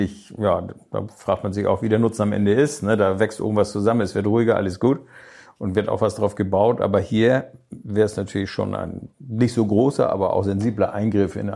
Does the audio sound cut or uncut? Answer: cut